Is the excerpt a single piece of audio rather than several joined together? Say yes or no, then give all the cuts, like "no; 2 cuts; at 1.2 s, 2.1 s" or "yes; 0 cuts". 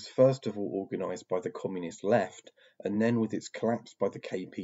yes; 0 cuts